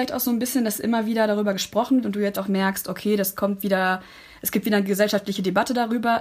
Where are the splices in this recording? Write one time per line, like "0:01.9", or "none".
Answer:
0:02.0
0:02.3